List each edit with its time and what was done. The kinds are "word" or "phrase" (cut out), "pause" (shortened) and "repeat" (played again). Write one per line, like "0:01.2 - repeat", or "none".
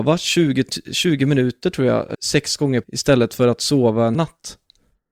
0:02.1 - word
0:02.8 - word
0:04.1 - word